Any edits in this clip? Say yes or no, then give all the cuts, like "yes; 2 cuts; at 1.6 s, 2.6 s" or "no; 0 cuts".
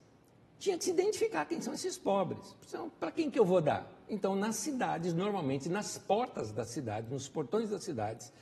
no; 0 cuts